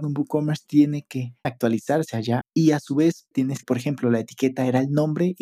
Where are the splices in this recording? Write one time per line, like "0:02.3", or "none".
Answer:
0:01.4
0:02.4
0:03.3
0:03.6